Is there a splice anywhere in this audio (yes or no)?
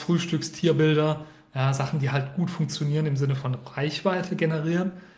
no